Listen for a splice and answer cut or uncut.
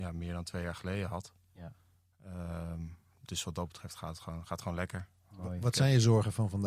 uncut